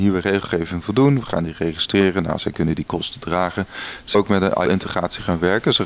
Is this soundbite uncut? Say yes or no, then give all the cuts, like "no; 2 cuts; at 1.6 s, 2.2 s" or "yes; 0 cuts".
no; 2 cuts; at 4.1 s, 4.7 s